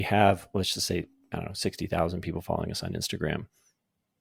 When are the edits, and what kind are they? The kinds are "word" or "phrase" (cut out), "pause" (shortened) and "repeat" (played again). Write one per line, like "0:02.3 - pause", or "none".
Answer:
none